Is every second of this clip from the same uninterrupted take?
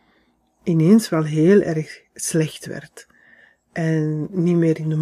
yes; 0 cuts

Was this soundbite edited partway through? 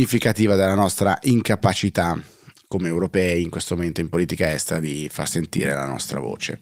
no; 0 cuts

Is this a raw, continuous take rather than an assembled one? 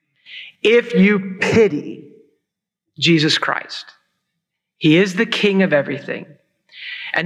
yes; 0 cuts

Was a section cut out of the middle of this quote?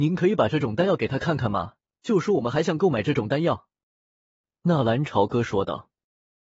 yes; 1 cut; at 1.8 s

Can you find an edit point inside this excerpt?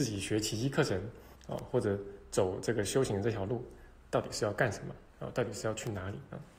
yes; 2 cuts; at 1.4 s, 5.1 s

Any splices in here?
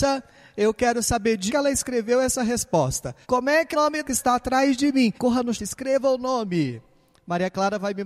yes; 6 cuts; at 1.5 s, 3.2 s, 3.7 s, 4.1 s, 5.2 s, 5.5 s

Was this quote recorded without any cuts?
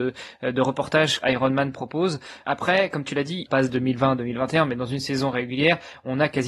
no; 3 cuts; at 1.2 s, 2.4 s, 3.5 s

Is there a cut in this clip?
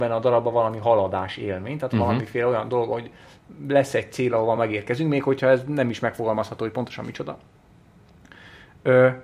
no; 0 cuts

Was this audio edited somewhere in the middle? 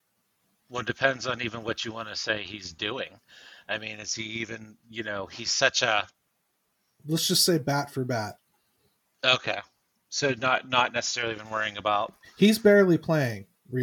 no; 0 cuts

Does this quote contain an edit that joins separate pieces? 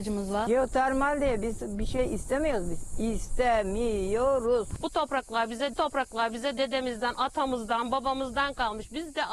yes; 1 cut; at 5.7 s

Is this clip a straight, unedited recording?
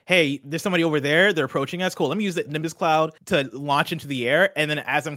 no; 1 cut; at 3.2 s

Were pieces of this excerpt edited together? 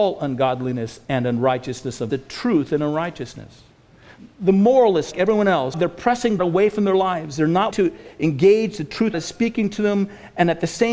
yes; 6 cuts; at 2.1 s, 4.3 s, 5.1 s, 6.4 s, 7.7 s, 9.1 s

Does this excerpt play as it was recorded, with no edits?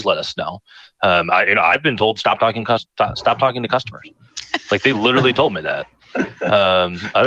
yes; 0 cuts

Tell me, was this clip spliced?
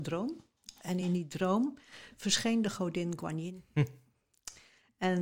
no; 0 cuts

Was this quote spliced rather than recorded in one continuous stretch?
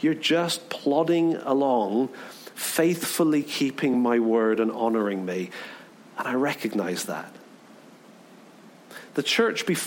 no; 0 cuts

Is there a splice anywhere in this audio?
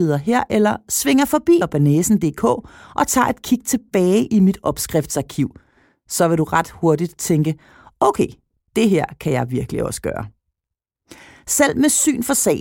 yes; 1 cut; at 1.6 s

